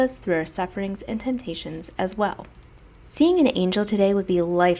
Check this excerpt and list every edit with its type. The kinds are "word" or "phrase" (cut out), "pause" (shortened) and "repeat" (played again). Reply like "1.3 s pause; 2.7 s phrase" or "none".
none

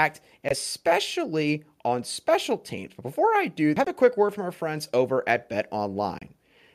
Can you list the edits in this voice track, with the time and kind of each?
3.8 s phrase

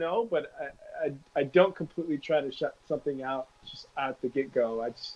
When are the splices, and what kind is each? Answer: 3.5 s pause

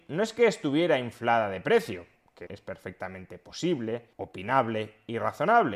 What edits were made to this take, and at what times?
2.5 s word; 4.1 s pause

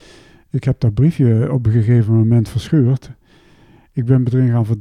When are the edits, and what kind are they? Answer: none

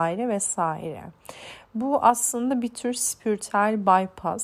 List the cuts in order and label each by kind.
none

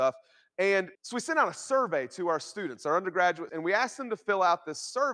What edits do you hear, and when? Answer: 0.9 s pause; 3.5 s word

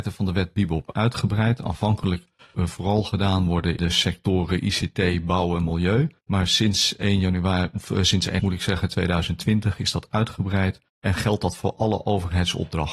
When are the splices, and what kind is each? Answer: 2.5 s phrase; 3.8 s word; 6.2 s pause; 8.4 s word; 10.9 s pause

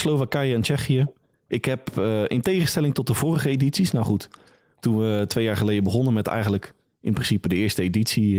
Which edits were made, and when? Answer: none

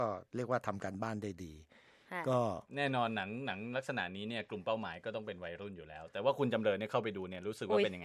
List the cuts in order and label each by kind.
2.7 s pause

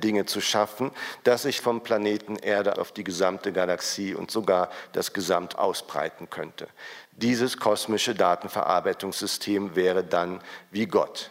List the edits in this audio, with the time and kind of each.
1.6 s word; 2.7 s word; 5.5 s word

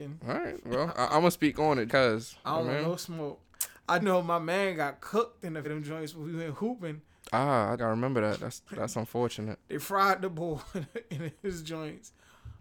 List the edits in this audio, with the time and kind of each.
1.9 s word; 4.0 s word; 5.6 s word; 7.8 s word; 8.7 s word

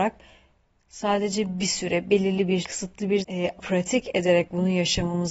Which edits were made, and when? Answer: 2.6 s word; 3.2 s word; 3.6 s word

